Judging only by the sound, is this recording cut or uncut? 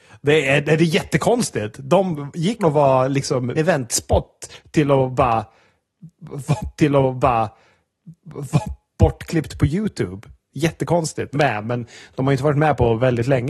cut